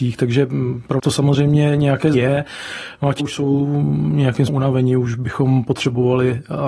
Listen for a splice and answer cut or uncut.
cut